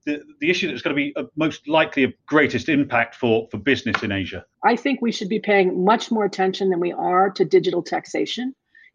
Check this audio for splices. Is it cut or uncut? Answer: cut